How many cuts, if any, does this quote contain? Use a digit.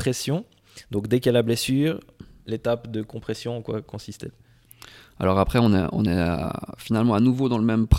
0